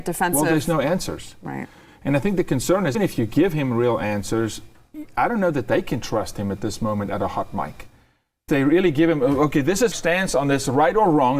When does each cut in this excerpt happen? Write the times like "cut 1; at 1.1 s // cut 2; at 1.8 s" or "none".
cut 1; at 2.9 s // cut 2; at 8.5 s // cut 3; at 9.9 s